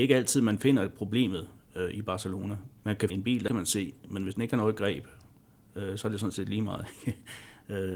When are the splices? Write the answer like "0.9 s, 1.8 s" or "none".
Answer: 2.8 s, 3.1 s, 3.5 s